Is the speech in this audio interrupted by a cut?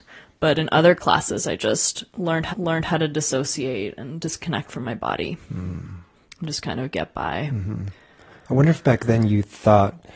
yes; 2 cuts; at 2.5 s, 5.4 s

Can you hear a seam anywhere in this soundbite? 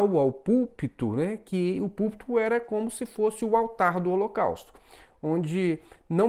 no; 0 cuts

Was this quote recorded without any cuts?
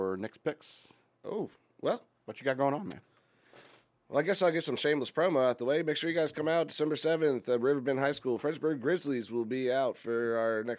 yes; 0 cuts

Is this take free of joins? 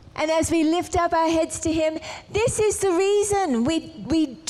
yes; 0 cuts

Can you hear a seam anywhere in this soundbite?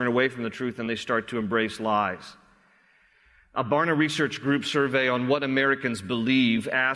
no; 0 cuts

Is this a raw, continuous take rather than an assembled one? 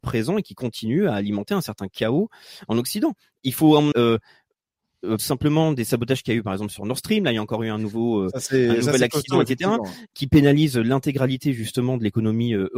no; 3 cuts; at 3.9 s, 5.2 s, 10.1 s

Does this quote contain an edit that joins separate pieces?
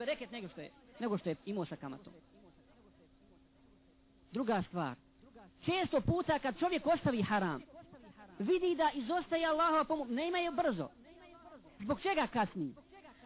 no; 0 cuts

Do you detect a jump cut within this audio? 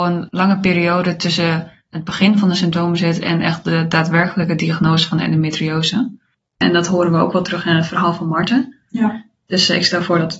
no; 0 cuts

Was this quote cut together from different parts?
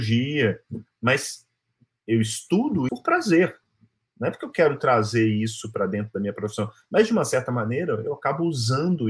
yes; 1 cut; at 2.9 s

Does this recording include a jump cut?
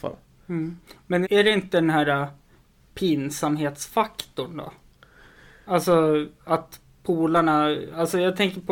yes; 1 cut; at 1.2 s

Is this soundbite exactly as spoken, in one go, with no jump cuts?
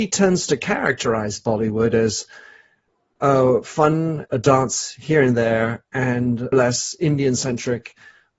no; 2 cuts; at 4.3 s, 6.5 s

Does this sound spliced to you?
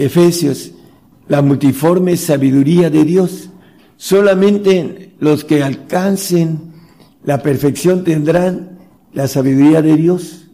no; 0 cuts

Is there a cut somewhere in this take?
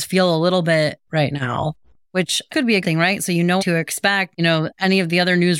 yes; 5 cuts; at 1.1 s, 2.5 s, 2.8 s, 3.6 s, 4.3 s

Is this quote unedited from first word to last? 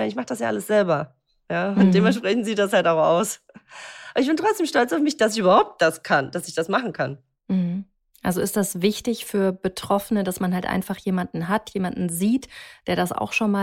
yes; 0 cuts

